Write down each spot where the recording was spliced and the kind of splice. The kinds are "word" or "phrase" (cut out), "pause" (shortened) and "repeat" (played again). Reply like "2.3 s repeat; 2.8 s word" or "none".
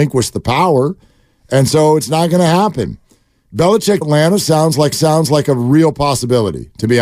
4.0 s word; 4.9 s repeat